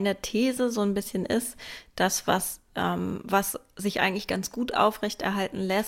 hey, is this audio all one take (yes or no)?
yes